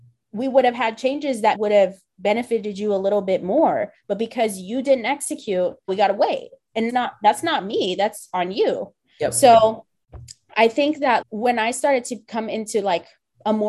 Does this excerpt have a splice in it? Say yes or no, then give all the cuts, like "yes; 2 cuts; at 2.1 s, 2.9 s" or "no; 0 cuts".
yes; 4 cuts; at 1.5 s, 5.9 s, 6.9 s, 11.2 s